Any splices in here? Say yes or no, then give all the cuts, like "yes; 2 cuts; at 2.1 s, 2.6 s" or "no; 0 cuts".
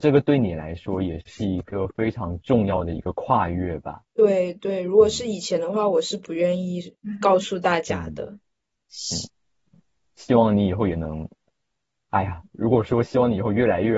no; 0 cuts